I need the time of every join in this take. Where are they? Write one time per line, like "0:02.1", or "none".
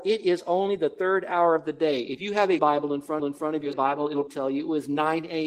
0:02.6
0:03.2
0:03.7
0:04.3